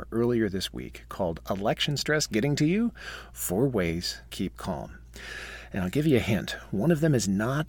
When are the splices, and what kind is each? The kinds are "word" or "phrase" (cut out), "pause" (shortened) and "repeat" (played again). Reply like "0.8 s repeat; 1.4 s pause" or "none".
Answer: 4.3 s word